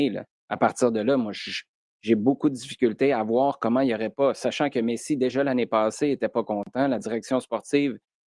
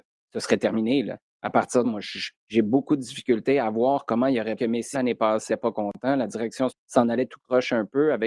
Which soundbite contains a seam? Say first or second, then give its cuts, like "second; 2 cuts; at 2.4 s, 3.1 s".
second; 6 cuts; at 1.8 s, 2.4 s, 4.6 s, 4.9 s, 5.5 s, 6.7 s